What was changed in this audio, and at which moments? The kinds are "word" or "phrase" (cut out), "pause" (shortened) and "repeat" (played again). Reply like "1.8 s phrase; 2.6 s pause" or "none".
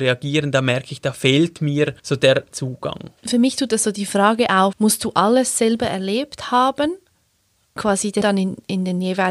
2.0 s pause; 2.5 s phrase; 3.2 s pause; 4.7 s word; 7.8 s word; 8.2 s word